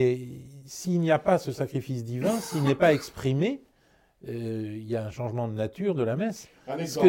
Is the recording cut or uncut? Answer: uncut